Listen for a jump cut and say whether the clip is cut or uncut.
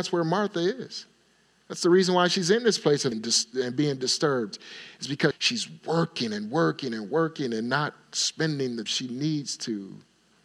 cut